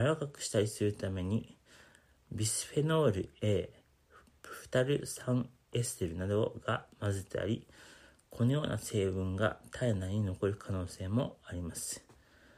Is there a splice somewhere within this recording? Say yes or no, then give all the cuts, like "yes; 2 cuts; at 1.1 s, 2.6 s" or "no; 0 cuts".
no; 0 cuts